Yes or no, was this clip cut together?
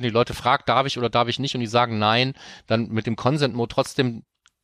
no